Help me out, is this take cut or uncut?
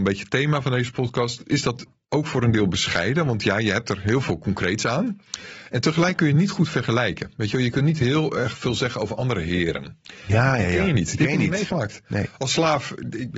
uncut